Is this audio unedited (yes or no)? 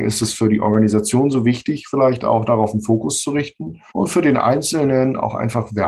no